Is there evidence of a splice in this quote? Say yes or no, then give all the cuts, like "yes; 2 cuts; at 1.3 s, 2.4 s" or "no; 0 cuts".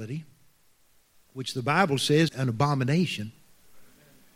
yes; 1 cut; at 2.3 s